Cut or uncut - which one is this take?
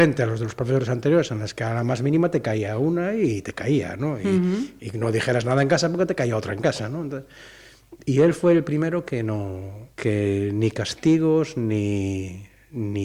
cut